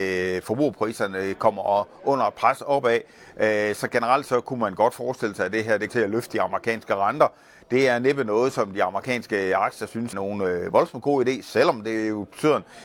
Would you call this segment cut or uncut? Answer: cut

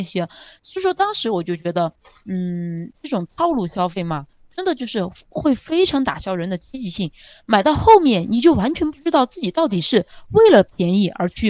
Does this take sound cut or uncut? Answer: uncut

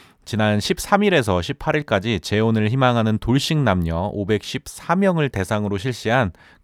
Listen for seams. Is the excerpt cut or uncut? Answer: uncut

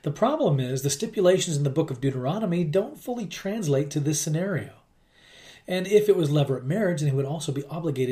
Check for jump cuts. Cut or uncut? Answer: uncut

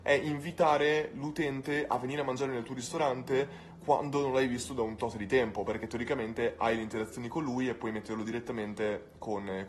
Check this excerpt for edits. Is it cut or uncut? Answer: uncut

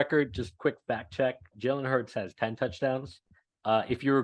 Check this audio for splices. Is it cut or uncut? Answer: cut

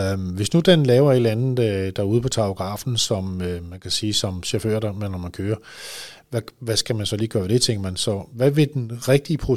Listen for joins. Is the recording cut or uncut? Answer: uncut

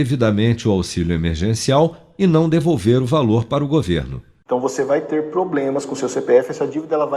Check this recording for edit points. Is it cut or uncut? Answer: uncut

